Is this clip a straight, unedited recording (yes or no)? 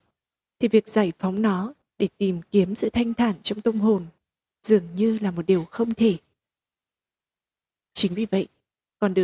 yes